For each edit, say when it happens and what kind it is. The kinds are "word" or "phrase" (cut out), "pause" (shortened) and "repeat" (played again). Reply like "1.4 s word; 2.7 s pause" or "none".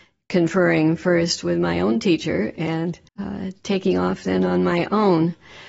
3.1 s pause

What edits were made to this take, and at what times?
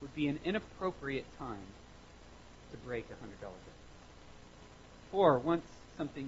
none

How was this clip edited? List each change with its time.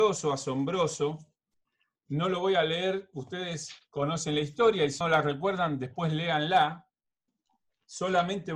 5.0 s word

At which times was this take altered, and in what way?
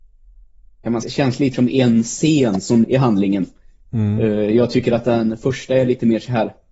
1.0 s word; 1.5 s word; 2.8 s phrase

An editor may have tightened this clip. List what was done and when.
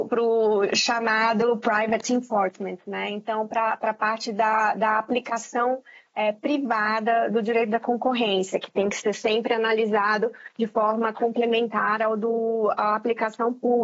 none

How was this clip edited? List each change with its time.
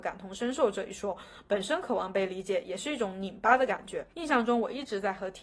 4.1 s pause

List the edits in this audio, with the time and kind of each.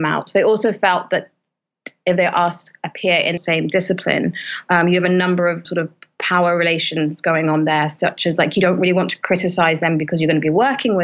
3.4 s phrase; 5.6 s word

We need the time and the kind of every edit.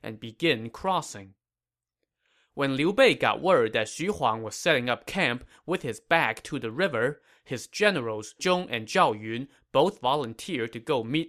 8.4 s word

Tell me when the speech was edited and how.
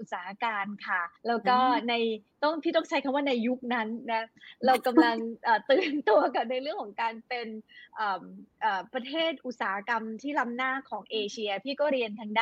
1.2 s pause

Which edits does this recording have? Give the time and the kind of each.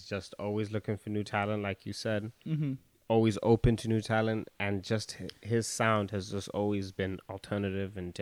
2.4 s pause

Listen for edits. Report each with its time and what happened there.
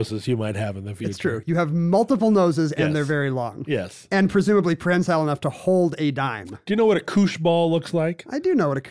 none

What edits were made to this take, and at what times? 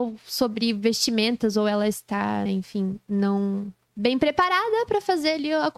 2.5 s word; 3.9 s word

